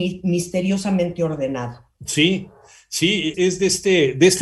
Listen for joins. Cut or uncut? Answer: cut